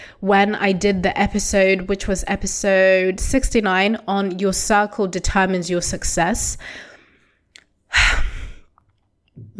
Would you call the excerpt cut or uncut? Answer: uncut